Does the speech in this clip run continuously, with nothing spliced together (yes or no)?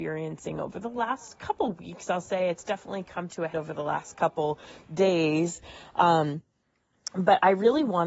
no